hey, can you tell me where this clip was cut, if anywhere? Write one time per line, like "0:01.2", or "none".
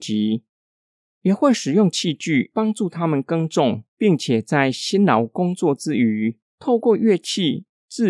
0:03.9